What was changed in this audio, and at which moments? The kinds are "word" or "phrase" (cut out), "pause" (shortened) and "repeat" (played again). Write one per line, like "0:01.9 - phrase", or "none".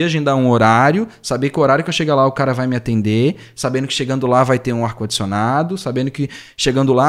none